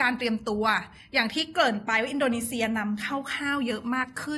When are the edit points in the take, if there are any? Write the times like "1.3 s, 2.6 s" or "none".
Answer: none